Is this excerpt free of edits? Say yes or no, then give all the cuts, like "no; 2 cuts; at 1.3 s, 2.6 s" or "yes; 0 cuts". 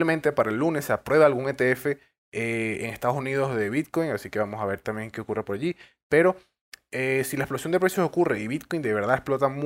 yes; 0 cuts